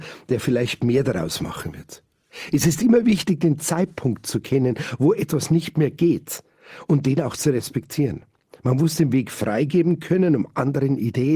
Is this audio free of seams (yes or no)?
yes